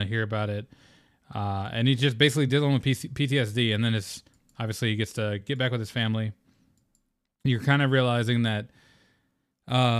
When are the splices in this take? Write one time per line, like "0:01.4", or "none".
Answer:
none